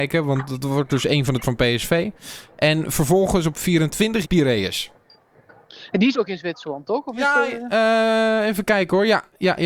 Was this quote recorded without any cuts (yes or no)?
no